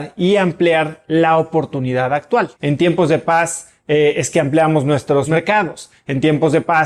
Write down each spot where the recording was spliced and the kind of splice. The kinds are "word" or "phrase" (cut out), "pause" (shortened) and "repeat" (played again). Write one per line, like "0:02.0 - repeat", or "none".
0:02.6 - pause